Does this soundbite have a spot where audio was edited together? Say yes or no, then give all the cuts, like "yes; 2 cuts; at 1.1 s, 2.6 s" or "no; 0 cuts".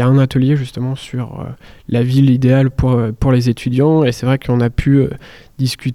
no; 0 cuts